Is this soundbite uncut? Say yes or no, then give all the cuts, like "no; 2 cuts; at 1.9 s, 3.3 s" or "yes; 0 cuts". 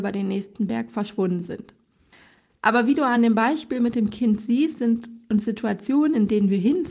yes; 0 cuts